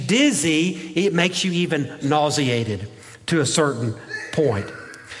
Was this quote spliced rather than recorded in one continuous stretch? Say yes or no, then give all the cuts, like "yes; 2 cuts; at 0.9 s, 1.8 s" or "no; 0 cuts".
no; 0 cuts